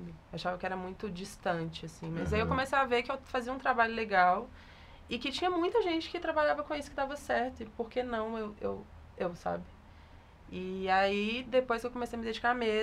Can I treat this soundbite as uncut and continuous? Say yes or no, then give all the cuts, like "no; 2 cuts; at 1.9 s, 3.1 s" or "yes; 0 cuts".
yes; 0 cuts